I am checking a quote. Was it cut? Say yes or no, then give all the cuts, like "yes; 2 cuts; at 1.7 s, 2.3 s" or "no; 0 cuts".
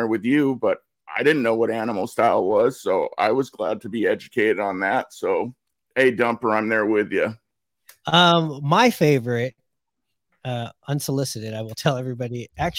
no; 0 cuts